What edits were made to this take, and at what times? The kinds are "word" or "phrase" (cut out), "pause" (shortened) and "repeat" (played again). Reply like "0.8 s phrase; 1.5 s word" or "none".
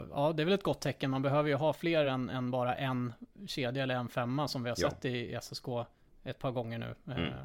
none